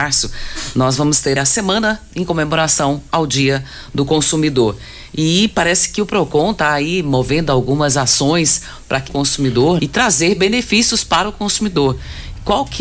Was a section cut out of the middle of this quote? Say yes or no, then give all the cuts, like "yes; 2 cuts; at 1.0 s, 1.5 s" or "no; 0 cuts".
yes; 3 cuts; at 1.4 s, 9.1 s, 9.8 s